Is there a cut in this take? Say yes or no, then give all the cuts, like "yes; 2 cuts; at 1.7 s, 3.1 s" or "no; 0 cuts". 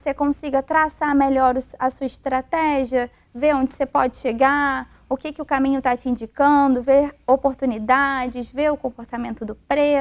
no; 0 cuts